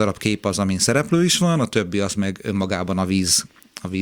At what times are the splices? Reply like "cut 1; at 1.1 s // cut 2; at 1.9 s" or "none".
none